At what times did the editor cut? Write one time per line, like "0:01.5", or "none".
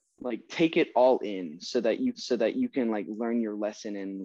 0:02.1